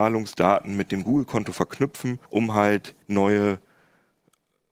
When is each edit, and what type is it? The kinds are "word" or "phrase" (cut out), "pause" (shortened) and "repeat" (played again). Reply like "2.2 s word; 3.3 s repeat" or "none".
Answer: 2.3 s pause; 3.0 s pause